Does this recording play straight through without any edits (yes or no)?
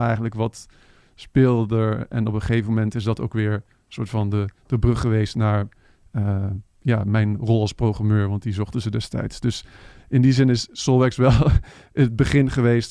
yes